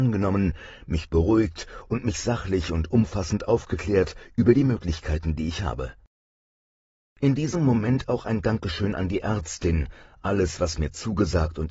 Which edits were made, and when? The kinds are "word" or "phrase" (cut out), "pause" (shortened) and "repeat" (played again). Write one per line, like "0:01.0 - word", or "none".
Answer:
none